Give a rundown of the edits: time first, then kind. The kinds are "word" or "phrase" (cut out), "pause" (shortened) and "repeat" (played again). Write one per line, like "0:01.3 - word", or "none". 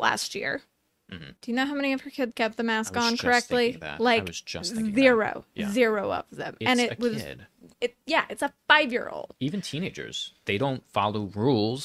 0:01.4 - pause
0:02.3 - word
0:07.7 - pause